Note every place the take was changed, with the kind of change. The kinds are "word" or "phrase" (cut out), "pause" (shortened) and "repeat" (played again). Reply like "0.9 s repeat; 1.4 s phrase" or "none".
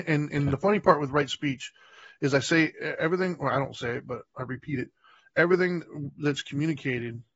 none